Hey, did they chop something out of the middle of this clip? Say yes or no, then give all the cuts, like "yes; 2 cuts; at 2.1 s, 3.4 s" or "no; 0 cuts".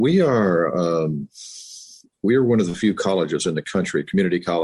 no; 0 cuts